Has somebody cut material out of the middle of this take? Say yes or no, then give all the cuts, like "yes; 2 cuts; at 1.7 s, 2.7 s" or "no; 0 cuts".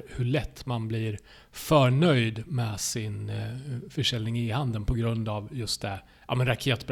no; 0 cuts